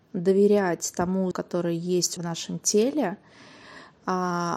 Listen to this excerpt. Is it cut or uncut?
cut